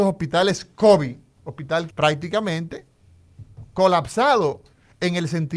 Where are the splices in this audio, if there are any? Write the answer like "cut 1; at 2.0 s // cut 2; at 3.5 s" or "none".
cut 1; at 1.9 s